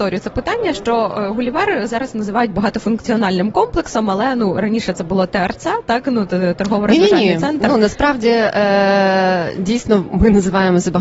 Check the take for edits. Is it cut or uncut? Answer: uncut